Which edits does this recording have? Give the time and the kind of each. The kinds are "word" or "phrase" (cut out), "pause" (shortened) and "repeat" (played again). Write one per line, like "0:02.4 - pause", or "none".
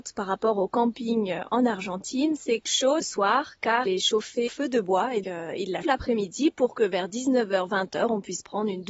0:02.7 - word
0:03.0 - phrase
0:03.9 - word
0:04.5 - word
0:05.2 - word
0:05.8 - word